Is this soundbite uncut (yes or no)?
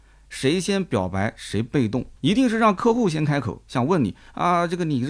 no